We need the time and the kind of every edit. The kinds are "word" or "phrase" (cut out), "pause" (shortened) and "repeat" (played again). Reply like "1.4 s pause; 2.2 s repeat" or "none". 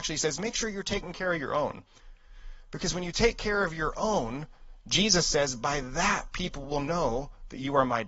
none